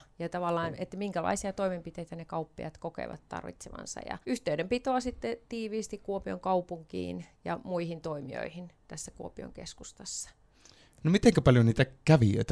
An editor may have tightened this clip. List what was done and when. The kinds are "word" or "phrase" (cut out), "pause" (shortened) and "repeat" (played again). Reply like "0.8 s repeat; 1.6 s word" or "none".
4.2 s pause